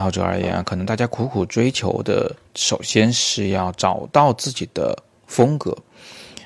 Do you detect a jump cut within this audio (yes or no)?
yes